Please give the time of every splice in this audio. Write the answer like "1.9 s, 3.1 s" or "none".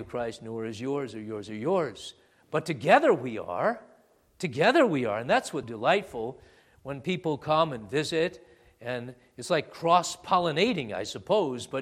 5.6 s